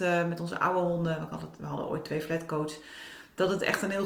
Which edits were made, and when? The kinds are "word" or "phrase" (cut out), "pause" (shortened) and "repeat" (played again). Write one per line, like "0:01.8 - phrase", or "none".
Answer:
none